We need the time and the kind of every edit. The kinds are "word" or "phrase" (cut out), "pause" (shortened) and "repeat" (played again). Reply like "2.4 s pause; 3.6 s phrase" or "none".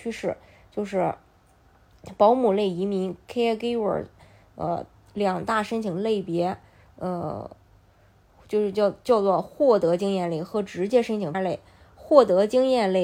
11.3 s word